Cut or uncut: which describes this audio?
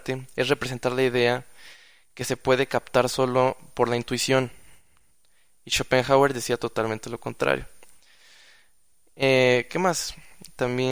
uncut